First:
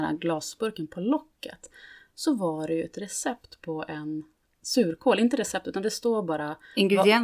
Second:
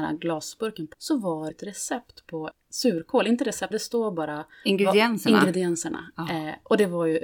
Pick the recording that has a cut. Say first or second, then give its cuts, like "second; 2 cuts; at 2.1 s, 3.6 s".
second; 4 cuts; at 0.9 s, 1.5 s, 2.5 s, 3.7 s